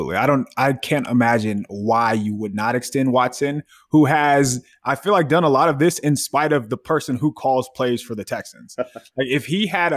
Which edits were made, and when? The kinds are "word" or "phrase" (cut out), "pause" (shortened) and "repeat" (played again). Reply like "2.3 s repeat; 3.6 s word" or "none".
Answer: none